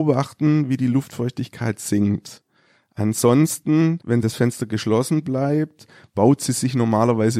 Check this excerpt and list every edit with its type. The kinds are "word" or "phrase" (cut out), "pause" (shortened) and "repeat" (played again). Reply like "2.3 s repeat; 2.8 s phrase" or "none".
none